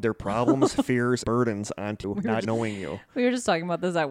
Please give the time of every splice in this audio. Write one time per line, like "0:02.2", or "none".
0:01.2
0:02.0
0:02.4